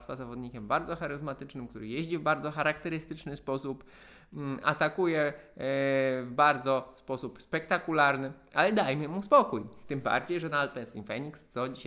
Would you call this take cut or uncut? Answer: cut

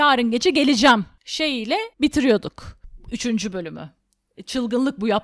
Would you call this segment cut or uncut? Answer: cut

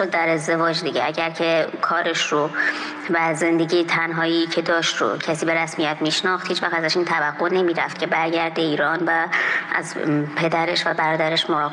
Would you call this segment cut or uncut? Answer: uncut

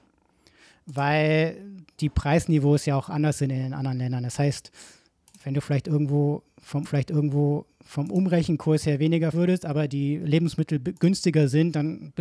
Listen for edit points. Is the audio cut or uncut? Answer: cut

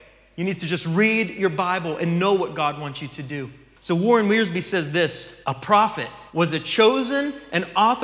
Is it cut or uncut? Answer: cut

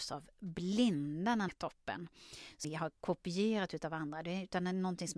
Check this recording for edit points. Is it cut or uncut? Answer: cut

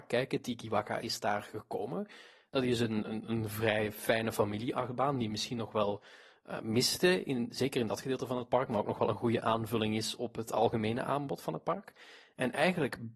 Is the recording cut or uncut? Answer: uncut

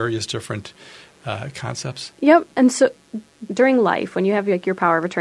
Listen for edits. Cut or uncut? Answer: cut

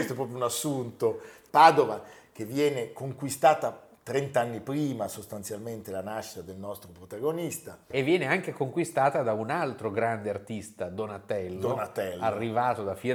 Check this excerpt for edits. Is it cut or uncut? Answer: cut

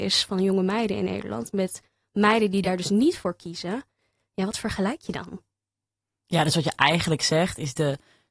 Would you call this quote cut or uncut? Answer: uncut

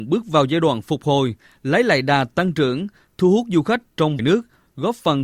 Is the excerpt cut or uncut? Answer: cut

